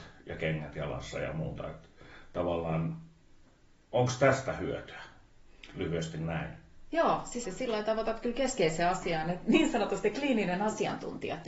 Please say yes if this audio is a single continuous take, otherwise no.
no